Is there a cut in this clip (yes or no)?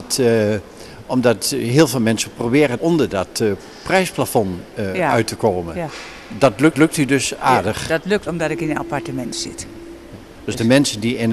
yes